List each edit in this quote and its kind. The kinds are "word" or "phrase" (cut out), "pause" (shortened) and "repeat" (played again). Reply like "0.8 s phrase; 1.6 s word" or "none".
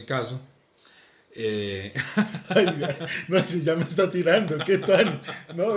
none

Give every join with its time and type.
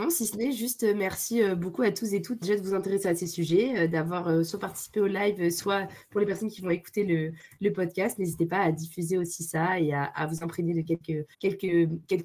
2.4 s word; 11.3 s pause

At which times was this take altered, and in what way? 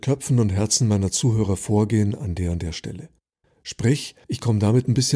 4.2 s pause

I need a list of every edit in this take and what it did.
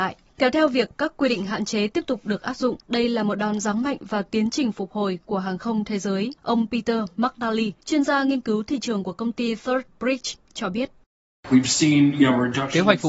2.8 s pause; 6.4 s pause; 7.8 s pause

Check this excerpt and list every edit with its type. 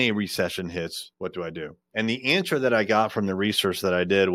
1.1 s pause

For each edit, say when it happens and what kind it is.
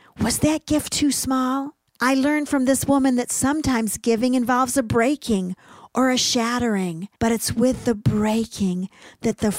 1.9 s pause; 7.2 s pause

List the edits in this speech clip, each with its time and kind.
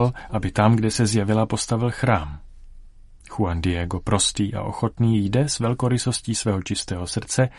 none

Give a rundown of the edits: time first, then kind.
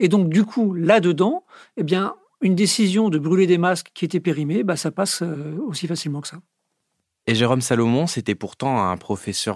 none

